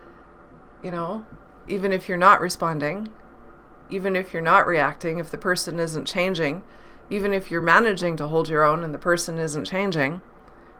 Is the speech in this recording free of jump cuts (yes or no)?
yes